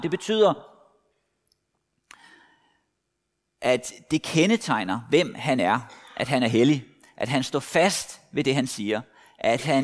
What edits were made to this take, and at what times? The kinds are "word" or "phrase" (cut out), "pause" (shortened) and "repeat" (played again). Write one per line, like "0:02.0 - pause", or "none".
none

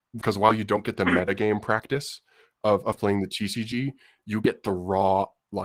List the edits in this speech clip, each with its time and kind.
none

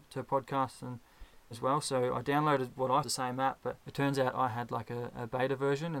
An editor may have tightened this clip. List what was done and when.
0:01.5 - phrase
0:03.0 - phrase
0:03.8 - pause

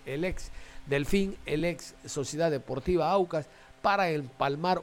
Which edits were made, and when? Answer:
none

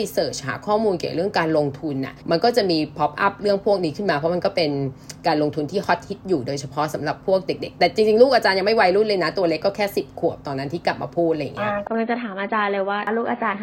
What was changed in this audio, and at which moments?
0:02.2 - pause

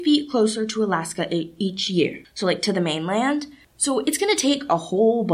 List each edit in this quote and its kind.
none

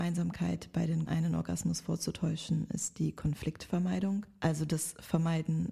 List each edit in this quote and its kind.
0:01.1 - word

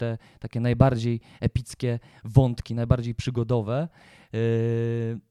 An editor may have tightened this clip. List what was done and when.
none

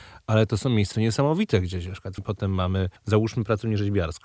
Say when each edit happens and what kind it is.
0:00.9 - word
0:02.2 - word
0:03.0 - pause

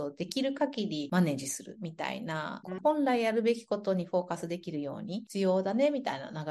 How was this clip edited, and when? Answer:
0:02.8 - phrase

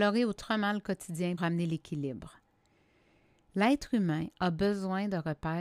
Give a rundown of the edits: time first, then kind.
0:01.4 - word

